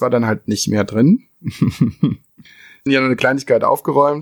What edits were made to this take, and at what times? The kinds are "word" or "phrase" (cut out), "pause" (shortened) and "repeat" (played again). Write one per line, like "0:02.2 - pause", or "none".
0:02.9 - phrase